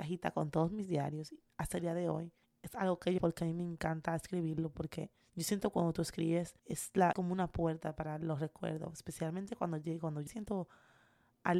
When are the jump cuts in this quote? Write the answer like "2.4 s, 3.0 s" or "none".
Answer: 2.4 s, 3.2 s, 5.2 s, 6.6 s, 7.1 s, 10.3 s